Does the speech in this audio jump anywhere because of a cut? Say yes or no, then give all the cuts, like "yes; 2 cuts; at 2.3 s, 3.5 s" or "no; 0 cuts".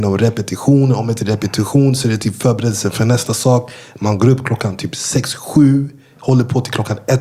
no; 0 cuts